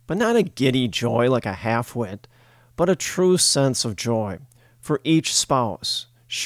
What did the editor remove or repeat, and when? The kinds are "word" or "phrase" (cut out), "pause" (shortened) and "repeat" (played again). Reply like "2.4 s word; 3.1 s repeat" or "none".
none